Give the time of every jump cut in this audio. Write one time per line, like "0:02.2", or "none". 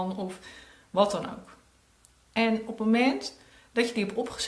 none